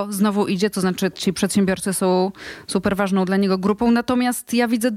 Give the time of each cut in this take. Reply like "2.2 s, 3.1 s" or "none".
none